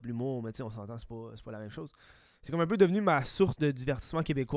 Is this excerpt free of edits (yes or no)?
yes